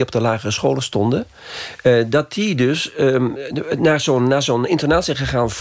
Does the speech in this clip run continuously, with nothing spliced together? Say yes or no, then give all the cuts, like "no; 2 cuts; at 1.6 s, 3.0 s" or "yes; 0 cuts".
yes; 0 cuts